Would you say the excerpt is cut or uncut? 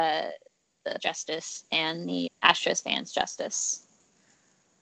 cut